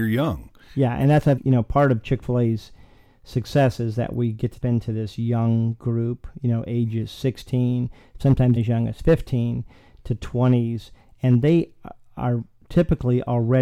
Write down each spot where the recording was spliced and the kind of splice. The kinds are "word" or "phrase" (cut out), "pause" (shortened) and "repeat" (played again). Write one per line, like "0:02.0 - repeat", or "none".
0:01.4 - word
0:04.6 - word
0:08.6 - word